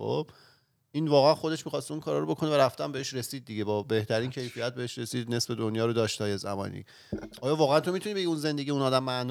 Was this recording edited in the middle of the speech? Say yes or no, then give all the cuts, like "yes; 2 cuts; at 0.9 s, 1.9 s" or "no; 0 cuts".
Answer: no; 0 cuts